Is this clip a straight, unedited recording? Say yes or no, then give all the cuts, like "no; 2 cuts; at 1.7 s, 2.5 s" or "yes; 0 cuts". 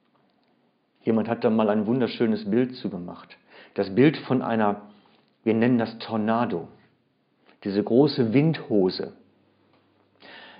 yes; 0 cuts